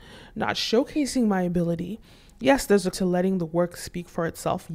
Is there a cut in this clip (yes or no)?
yes